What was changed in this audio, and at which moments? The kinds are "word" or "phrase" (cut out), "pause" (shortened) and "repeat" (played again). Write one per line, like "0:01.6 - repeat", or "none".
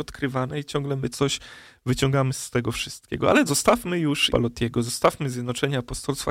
0:01.1 - word
0:03.5 - word
0:04.3 - word